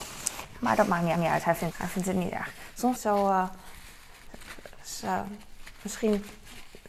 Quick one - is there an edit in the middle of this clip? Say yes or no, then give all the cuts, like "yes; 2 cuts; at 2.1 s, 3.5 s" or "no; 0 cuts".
yes; 3 cuts; at 1.1 s, 1.7 s, 3.0 s